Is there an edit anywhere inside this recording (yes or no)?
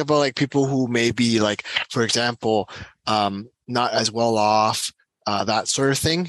no